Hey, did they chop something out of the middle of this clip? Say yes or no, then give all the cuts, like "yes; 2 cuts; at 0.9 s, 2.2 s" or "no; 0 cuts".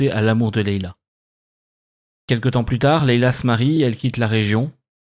no; 0 cuts